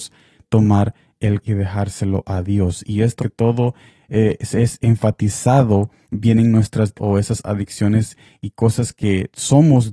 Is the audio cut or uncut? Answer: cut